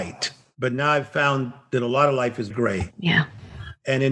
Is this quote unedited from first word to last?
no; 1 cut; at 2.5 s

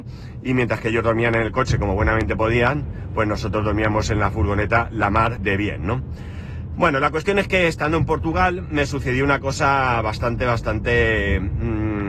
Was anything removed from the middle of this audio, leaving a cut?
yes; 1 cut; at 5.4 s

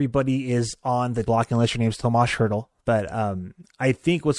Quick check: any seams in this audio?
yes; 2 cuts; at 1.2 s, 2.8 s

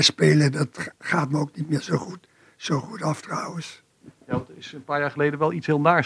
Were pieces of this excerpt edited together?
no; 0 cuts

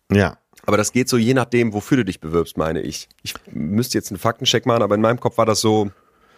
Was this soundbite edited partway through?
yes; 1 cut; at 3.1 s

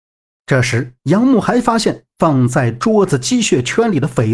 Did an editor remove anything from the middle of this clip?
yes; 1 cut; at 1.0 s

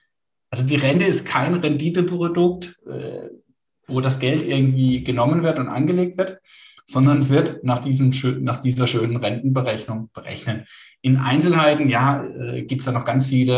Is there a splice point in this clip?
no; 0 cuts

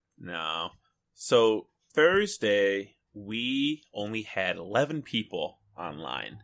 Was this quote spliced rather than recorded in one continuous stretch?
yes; 1 cut; at 3.0 s

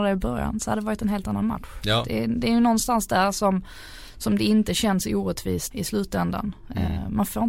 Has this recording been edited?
yes; 1 cut; at 5.7 s

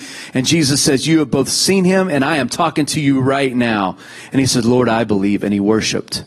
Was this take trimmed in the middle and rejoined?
no; 0 cuts

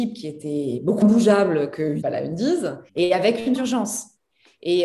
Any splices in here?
yes; 4 cuts; at 1.0 s, 2.0 s, 2.9 s, 3.6 s

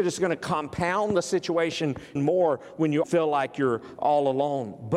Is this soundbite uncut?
no; 2 cuts; at 2.2 s, 3.0 s

